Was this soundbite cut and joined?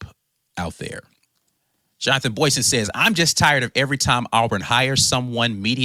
yes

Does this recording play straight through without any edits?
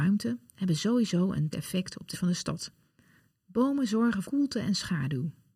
no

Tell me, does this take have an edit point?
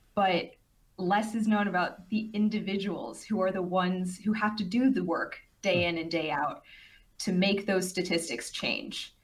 no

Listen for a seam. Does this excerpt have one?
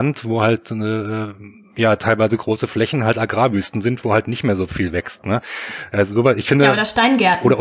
no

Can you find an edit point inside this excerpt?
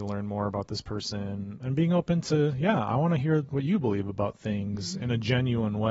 yes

